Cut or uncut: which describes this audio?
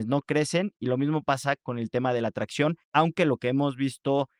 cut